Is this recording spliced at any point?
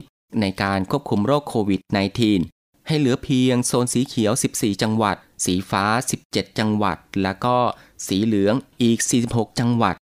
no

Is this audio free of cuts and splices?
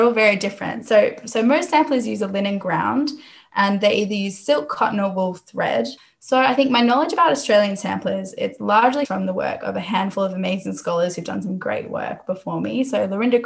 no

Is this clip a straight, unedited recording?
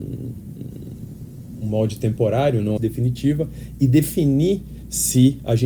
no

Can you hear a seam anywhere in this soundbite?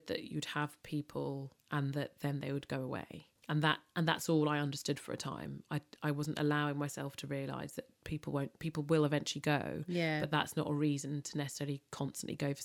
yes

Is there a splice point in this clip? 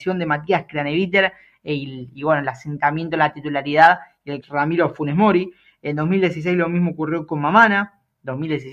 yes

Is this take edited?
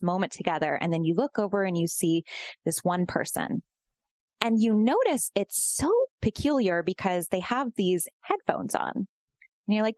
no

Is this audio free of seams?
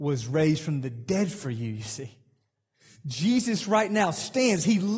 yes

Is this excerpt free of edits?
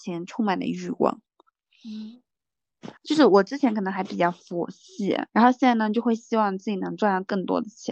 no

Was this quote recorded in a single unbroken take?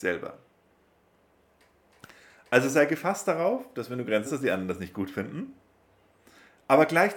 no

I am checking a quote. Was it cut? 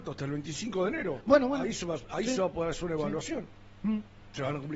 no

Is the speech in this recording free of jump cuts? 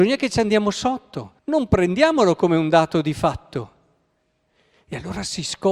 no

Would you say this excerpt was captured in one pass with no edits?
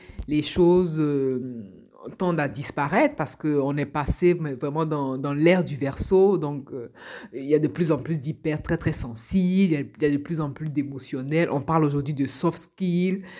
yes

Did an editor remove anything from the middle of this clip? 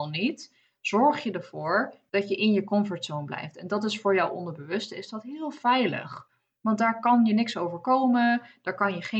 no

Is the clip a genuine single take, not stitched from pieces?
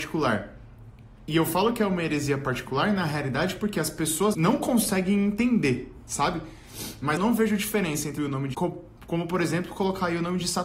no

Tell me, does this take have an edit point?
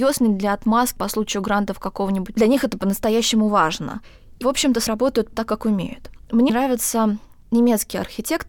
yes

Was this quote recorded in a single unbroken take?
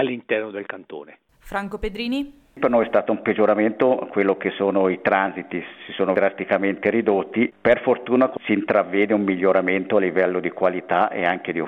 no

